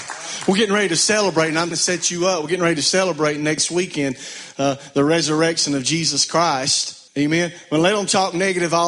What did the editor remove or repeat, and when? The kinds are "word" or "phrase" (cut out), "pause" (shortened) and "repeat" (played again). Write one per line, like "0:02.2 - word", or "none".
0:01.7 - word
0:07.1 - pause